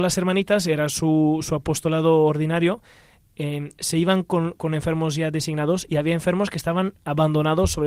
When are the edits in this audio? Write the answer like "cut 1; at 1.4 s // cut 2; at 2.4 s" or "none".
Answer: none